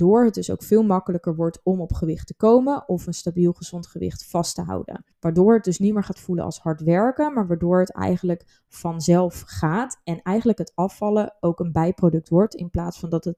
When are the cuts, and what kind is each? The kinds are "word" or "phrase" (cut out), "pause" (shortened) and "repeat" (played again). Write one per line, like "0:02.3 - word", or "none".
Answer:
0:05.1 - pause